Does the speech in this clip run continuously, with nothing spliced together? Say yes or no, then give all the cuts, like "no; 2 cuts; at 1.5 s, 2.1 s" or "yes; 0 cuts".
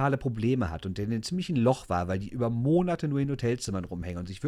yes; 0 cuts